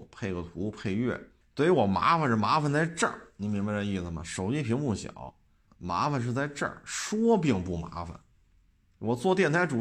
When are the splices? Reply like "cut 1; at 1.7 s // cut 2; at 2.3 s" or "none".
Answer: cut 1; at 1.4 s // cut 2; at 5.7 s